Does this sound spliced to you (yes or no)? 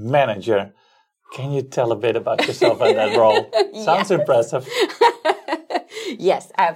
no